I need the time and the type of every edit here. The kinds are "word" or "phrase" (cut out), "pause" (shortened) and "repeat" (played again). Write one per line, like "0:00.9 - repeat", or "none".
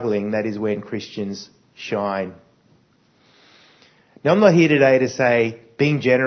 none